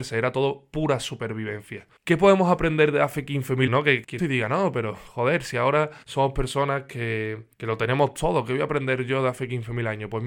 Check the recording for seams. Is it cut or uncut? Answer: cut